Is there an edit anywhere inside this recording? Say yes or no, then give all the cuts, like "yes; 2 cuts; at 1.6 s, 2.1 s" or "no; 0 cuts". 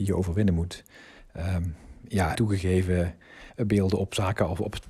yes; 2 cuts; at 2.3 s, 3.5 s